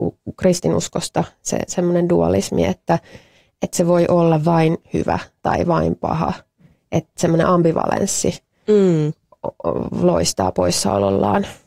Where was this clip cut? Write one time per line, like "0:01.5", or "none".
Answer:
none